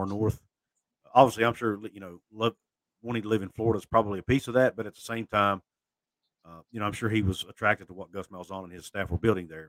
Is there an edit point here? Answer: no; 0 cuts

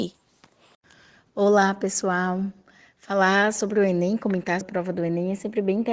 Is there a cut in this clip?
yes; 1 cut; at 4.6 s

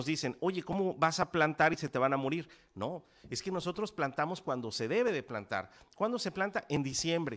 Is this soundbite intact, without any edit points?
yes; 0 cuts

